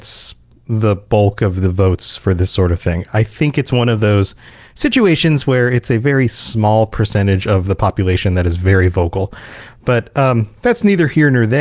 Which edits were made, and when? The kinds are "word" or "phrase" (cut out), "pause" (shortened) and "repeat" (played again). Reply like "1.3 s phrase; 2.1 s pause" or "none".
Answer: none